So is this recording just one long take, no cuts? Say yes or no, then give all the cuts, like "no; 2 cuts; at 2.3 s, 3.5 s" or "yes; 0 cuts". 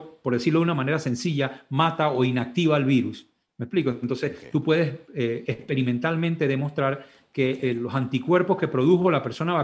yes; 0 cuts